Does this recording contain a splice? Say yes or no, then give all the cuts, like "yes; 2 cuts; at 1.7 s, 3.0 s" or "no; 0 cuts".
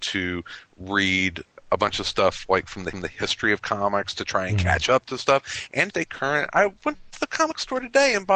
yes; 2 cuts; at 2.9 s, 5.9 s